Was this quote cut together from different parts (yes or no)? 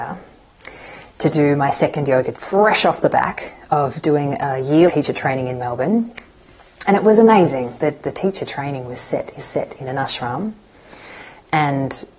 yes